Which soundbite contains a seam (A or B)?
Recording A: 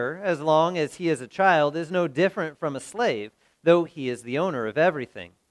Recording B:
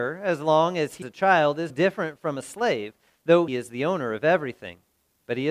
B